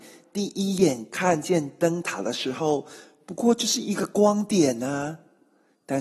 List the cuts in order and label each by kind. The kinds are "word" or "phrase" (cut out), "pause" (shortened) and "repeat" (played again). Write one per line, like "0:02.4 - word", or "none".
none